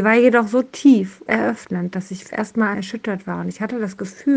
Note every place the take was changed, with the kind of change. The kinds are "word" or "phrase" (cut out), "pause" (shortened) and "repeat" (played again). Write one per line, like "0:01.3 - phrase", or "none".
0:01.3 - phrase
0:02.3 - word
0:02.7 - word